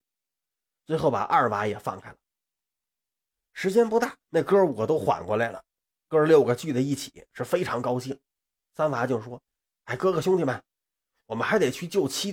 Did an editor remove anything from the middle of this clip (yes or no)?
yes